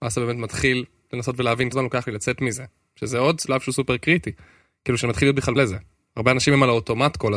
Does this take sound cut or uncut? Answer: cut